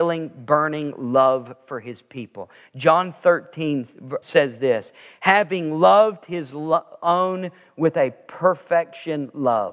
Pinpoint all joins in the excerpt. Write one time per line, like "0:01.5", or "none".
0:04.2